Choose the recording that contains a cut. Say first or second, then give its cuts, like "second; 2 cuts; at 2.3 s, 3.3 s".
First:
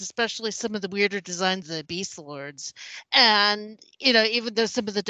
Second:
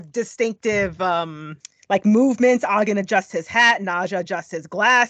first; 2 cuts; at 1.6 s, 3.1 s